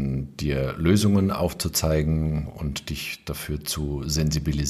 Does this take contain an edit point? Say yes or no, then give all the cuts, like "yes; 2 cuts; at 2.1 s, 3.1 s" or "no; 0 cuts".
no; 0 cuts